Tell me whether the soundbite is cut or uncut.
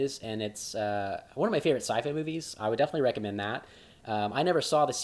uncut